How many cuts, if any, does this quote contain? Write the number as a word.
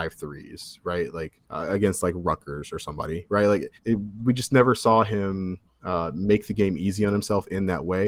three